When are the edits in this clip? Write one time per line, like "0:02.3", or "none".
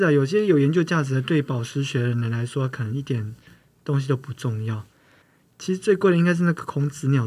none